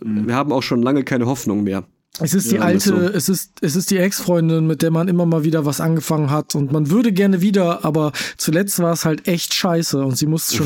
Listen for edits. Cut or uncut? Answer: uncut